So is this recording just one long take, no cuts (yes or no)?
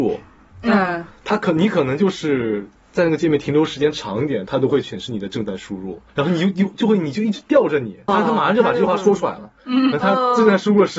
no